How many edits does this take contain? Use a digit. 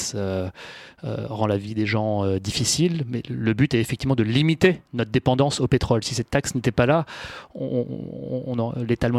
1